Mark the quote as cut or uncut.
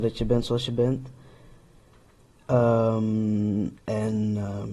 cut